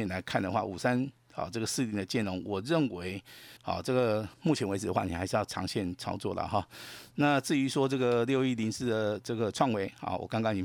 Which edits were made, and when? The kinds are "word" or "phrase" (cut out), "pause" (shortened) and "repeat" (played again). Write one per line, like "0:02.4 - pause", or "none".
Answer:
0:03.6 - pause
0:04.3 - pause